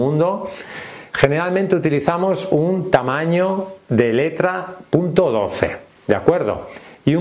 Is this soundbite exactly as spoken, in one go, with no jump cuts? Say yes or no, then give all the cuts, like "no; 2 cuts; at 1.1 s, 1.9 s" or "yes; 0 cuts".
yes; 0 cuts